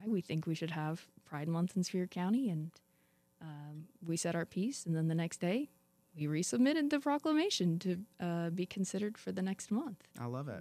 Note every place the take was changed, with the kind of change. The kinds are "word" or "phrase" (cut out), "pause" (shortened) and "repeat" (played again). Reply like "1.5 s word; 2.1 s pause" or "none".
none